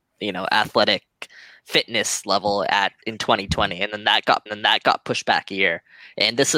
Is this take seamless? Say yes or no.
no